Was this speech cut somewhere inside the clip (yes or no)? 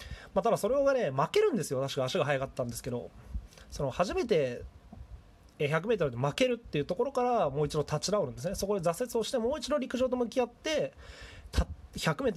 no